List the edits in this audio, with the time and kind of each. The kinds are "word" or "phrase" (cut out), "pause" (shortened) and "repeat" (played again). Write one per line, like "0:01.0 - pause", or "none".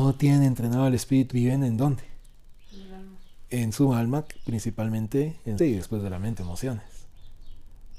0:01.3 - phrase
0:05.6 - phrase
0:06.4 - phrase